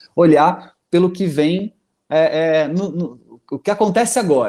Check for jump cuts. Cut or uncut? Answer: uncut